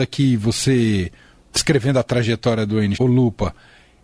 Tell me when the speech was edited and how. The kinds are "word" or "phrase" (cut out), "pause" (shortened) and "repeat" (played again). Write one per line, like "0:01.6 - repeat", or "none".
0:02.9 - word